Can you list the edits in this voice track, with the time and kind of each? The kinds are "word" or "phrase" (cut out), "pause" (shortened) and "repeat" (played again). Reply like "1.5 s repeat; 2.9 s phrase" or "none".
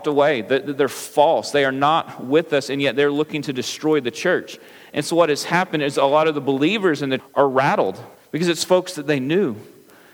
7.2 s word; 8.1 s pause